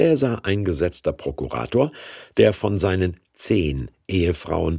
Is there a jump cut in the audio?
no; 0 cuts

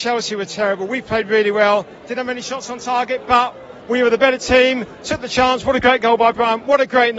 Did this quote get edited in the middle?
no; 0 cuts

